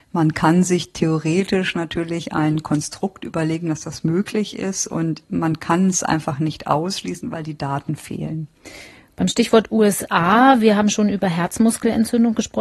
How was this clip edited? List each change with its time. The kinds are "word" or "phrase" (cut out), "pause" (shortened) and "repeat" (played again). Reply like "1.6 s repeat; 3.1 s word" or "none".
none